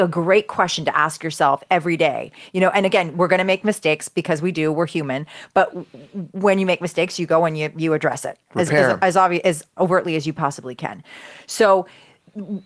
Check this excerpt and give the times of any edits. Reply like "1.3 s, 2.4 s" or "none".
9.8 s